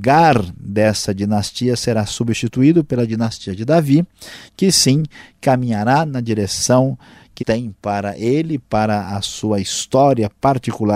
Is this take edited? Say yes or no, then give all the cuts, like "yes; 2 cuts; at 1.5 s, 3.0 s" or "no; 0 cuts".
yes; 1 cut; at 7.4 s